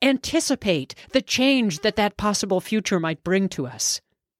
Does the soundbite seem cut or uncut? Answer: uncut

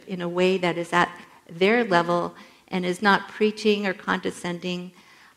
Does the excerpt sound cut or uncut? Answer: uncut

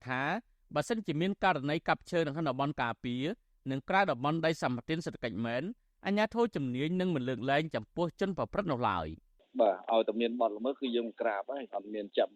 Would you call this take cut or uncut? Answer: uncut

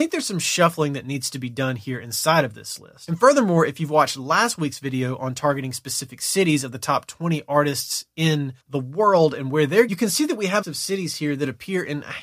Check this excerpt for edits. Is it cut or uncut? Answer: cut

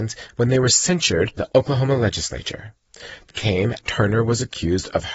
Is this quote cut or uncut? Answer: cut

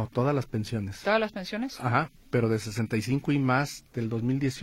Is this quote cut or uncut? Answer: uncut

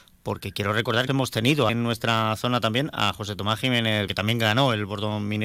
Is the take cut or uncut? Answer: cut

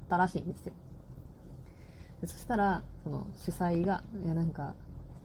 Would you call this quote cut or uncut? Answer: uncut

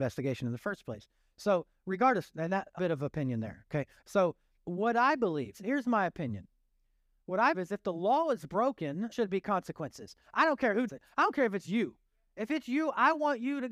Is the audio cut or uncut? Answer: cut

